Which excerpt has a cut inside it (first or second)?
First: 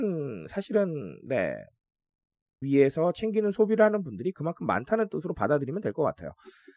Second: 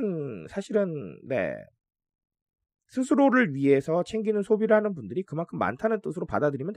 first